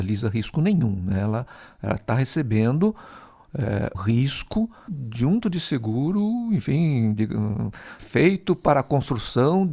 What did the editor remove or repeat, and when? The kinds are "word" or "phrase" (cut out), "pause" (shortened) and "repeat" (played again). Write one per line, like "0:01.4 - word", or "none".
0:03.9 - word
0:04.9 - word
0:05.4 - word
0:08.0 - word

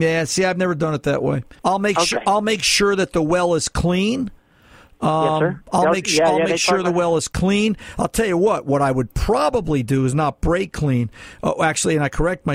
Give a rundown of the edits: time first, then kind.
0:01.6 - pause

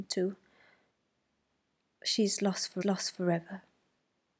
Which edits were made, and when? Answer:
0:02.8 - repeat

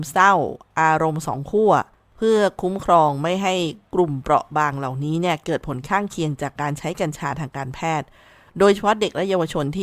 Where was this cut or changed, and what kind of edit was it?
0:01.9 - pause

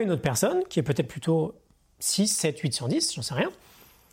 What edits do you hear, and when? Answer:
none

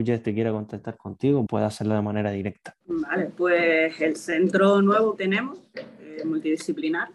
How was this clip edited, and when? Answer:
0:01.5 - word
0:02.8 - pause
0:05.2 - word

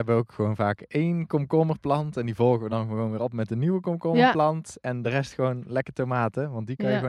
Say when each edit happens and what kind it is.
none

